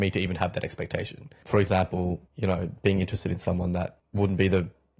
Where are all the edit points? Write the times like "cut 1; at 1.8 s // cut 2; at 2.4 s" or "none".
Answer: cut 1; at 2.3 s